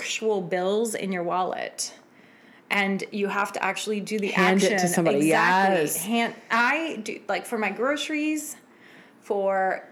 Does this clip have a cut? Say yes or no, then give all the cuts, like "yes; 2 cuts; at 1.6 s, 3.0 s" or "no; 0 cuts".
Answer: no; 0 cuts